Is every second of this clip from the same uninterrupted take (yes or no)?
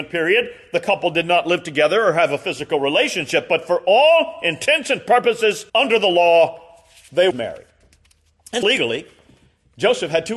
no